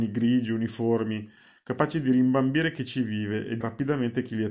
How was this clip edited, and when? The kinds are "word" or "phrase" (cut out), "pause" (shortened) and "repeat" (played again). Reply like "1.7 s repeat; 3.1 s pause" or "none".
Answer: 3.6 s word